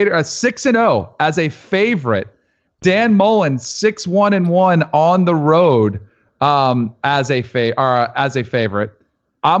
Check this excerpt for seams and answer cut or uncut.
uncut